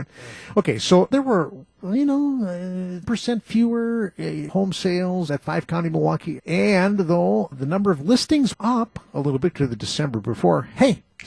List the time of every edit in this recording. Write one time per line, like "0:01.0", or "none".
0:01.1
0:03.0
0:04.5
0:05.3
0:06.4
0:07.5
0:08.5
0:09.5